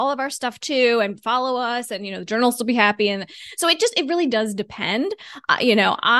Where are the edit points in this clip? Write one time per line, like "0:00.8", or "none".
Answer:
none